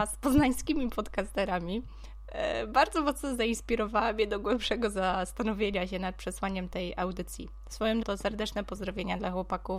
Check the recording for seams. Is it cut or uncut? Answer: cut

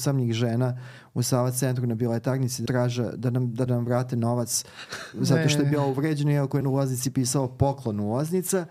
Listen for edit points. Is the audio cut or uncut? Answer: cut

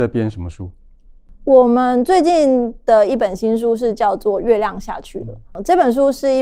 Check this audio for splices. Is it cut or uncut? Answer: cut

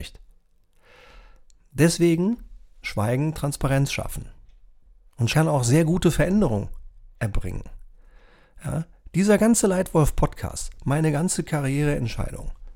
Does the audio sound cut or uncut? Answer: cut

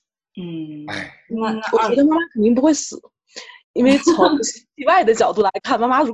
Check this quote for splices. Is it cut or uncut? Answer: cut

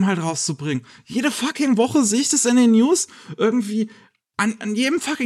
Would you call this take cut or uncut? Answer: uncut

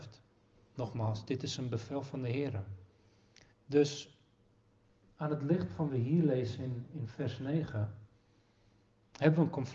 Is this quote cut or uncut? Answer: cut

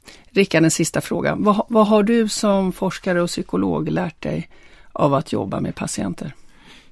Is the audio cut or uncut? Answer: uncut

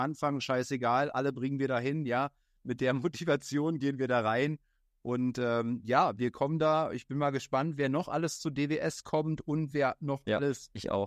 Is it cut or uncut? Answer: uncut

